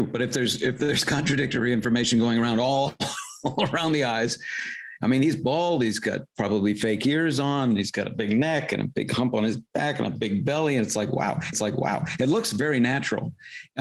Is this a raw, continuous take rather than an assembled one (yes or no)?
no